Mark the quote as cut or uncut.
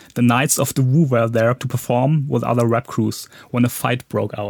uncut